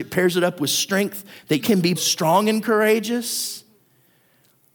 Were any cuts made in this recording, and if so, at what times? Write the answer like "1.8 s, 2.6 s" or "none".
1.6 s, 2.0 s